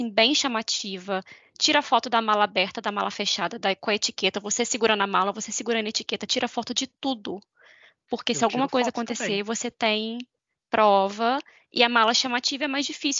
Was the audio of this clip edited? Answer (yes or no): no